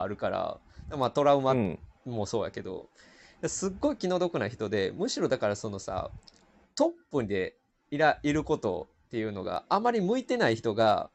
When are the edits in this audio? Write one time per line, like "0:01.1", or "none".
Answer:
none